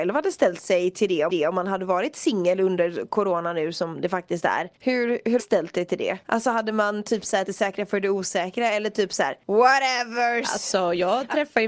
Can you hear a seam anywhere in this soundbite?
yes; 6 cuts; at 1.3 s, 4.8 s, 5.4 s, 6.2 s, 7.5 s, 9.4 s

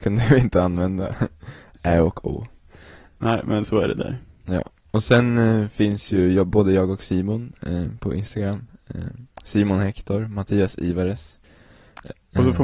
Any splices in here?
no; 0 cuts

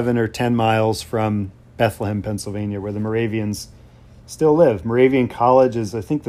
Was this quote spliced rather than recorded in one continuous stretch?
no; 0 cuts

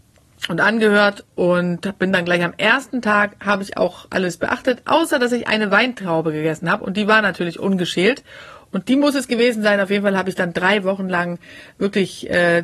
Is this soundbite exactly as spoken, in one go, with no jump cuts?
yes; 0 cuts

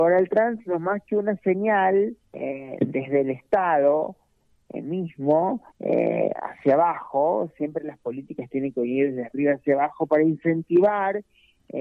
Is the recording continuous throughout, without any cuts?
no; 2 cuts; at 2.2 s, 5.7 s

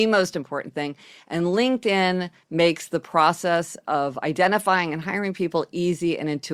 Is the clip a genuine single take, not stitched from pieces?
yes; 0 cuts

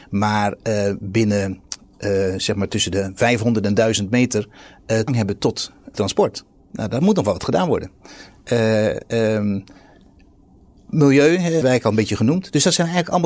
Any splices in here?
yes; 3 cuts; at 5.1 s, 5.9 s, 11.6 s

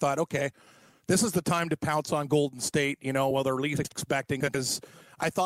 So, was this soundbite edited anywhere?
no; 0 cuts

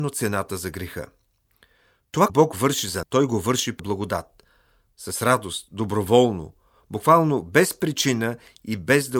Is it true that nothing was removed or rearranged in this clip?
no; 3 cuts; at 2.3 s, 3.0 s, 3.8 s

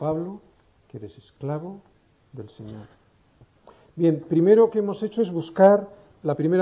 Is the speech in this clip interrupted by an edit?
no; 0 cuts

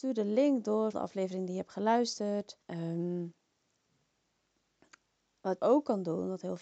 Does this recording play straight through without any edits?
no; 3 cuts; at 0.9 s, 2.6 s, 5.6 s

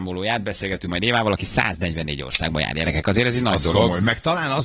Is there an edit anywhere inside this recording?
no; 0 cuts

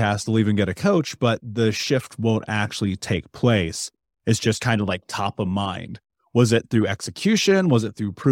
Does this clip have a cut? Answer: no; 0 cuts

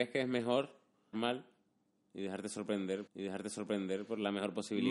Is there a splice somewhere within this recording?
yes; 2 cuts; at 1.1 s, 3.1 s

